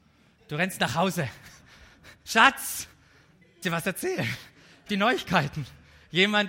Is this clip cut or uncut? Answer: cut